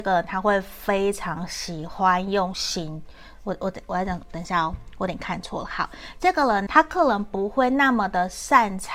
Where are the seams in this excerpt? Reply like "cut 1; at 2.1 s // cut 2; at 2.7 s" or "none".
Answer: cut 1; at 6.7 s